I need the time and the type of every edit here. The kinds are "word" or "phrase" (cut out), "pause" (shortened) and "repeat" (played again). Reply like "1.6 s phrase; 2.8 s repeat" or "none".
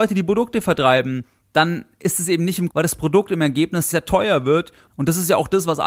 2.7 s word; 3.9 s word